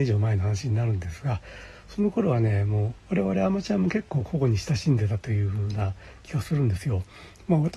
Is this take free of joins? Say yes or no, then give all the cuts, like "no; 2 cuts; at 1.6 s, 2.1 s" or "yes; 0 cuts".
no; 1 cut; at 3.0 s